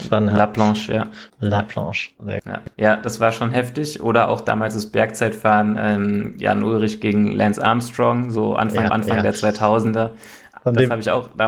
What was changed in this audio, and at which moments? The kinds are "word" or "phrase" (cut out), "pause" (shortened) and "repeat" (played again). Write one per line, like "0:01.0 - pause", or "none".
0:01.3 - pause
0:02.7 - pause
0:08.9 - repeat